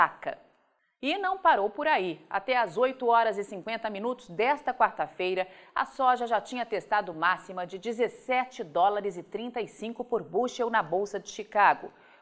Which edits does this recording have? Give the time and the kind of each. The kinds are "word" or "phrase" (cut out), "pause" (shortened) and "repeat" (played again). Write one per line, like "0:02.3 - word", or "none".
none